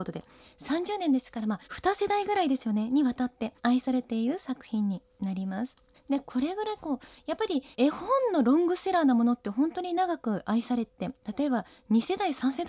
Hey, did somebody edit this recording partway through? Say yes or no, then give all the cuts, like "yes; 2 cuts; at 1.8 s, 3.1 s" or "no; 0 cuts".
yes; 4 cuts; at 1.6 s, 3.6 s, 5.9 s, 7.7 s